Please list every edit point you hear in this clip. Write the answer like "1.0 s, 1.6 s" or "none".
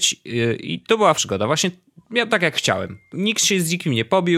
1.1 s, 2.3 s, 3.1 s